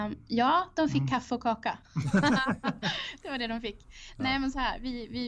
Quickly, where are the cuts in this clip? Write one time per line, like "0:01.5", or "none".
0:01.8

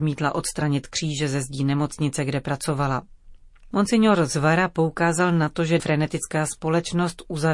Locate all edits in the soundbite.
0:05.8

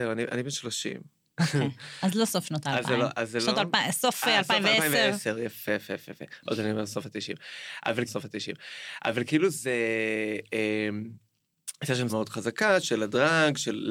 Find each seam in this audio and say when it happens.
0:05.7
0:08.1
0:12.1

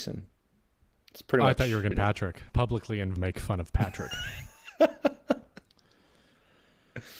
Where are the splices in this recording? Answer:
0:01.9
0:02.5
0:03.2

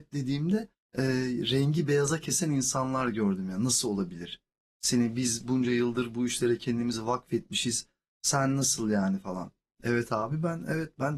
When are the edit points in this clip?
none

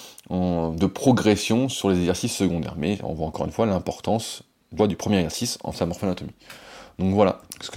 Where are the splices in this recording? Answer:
0:04.8
0:05.7

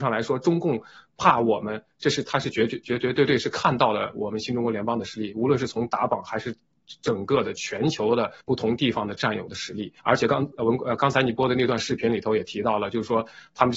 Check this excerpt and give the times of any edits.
0:08.4
0:10.0

